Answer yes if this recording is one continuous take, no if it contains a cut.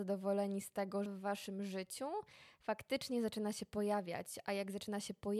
no